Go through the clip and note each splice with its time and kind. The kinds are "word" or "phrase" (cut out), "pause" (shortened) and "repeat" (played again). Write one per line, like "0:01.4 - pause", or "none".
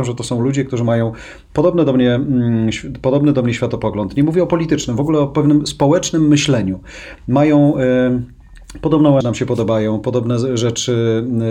0:09.2 - phrase